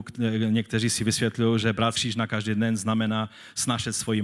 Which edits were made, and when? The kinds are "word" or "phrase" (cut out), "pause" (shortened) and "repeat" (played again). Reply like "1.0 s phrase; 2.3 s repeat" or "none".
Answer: 1.9 s word

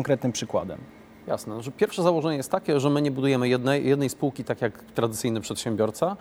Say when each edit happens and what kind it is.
none

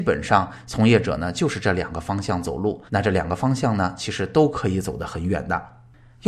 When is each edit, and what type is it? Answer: 2.9 s pause

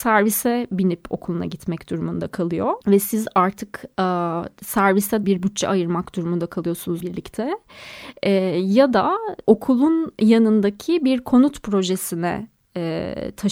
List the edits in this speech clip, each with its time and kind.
2.8 s pause; 5.2 s phrase; 7.0 s word; 9.4 s pause

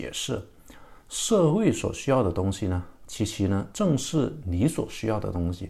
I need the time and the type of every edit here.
3.7 s phrase

